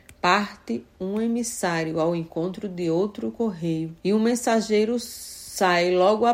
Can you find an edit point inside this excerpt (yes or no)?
yes